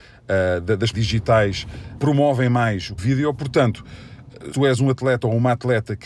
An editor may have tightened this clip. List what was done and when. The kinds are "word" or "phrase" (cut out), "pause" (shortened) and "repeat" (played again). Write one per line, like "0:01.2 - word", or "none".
0:00.9 - word
0:02.0 - word
0:03.0 - word
0:04.5 - word